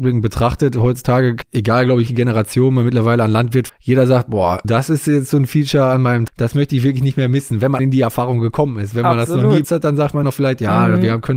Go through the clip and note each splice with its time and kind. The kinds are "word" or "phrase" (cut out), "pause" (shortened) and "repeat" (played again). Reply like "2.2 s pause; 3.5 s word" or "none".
1.4 s word; 2.1 s word; 3.7 s word; 4.6 s word; 6.3 s word; 7.8 s word; 9.6 s word; 10.2 s word